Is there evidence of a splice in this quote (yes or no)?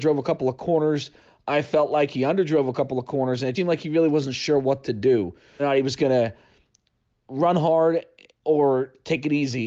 yes